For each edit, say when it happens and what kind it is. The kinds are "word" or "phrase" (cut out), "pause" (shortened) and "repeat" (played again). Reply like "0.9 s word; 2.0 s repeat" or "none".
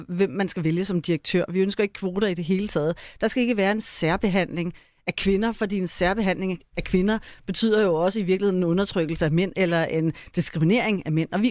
none